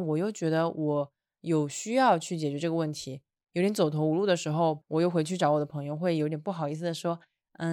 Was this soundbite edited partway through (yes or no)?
no